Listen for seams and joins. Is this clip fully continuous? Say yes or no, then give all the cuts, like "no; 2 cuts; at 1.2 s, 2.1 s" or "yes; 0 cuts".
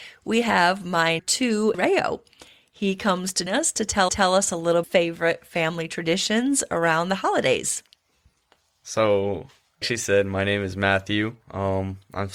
no; 6 cuts; at 1.2 s, 1.7 s, 3.5 s, 4.1 s, 4.8 s, 9.8 s